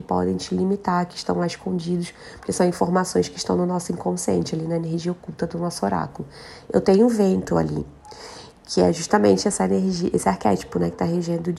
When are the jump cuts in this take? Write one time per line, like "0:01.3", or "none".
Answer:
none